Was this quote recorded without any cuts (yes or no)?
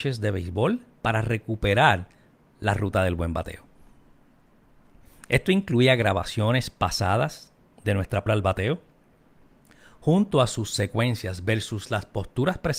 no